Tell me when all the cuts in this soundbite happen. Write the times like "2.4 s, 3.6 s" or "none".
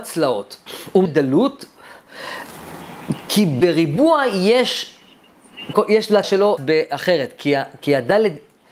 1.1 s, 5.7 s, 6.2 s, 6.6 s